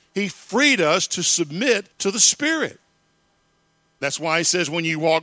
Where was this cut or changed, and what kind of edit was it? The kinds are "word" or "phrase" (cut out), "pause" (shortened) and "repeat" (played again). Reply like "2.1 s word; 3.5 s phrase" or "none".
1.9 s pause

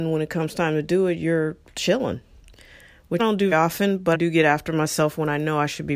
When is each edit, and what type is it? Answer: 3.2 s word; 3.5 s word; 4.1 s word

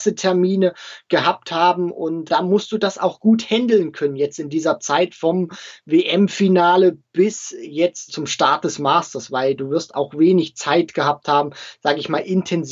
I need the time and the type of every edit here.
2.3 s word; 8.1 s word

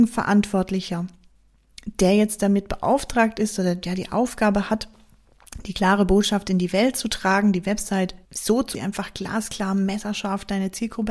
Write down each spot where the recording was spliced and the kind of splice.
8.2 s pause; 8.7 s phrase

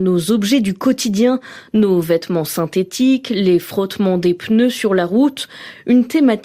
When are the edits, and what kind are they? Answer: none

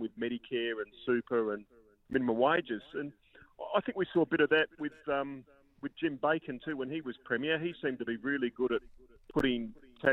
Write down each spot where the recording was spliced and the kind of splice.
none

